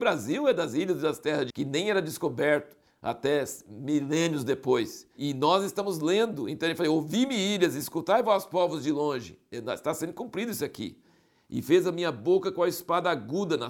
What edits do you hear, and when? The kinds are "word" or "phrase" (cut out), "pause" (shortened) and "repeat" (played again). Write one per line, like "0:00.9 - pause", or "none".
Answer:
0:01.5 - word